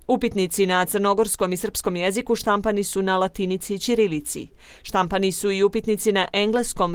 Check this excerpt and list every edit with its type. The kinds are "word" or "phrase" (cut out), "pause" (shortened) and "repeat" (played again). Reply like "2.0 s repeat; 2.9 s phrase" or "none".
none